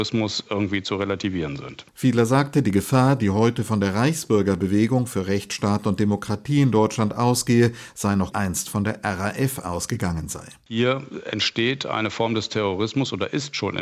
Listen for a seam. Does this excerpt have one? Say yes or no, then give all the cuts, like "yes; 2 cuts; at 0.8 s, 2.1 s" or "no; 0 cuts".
yes; 1 cut; at 8.3 s